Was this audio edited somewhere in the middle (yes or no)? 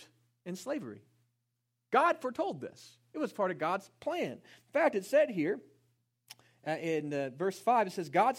no